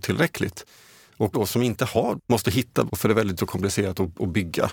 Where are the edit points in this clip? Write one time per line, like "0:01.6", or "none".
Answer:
0:01.3
0:02.2
0:02.9
0:03.4